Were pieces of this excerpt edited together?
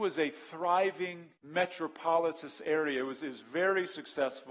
yes; 1 cut; at 1.4 s

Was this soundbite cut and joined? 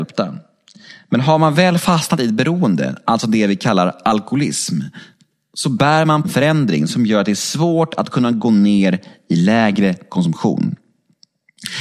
yes; 1 cut; at 6.2 s

